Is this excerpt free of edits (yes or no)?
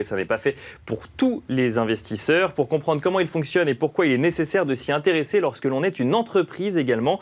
yes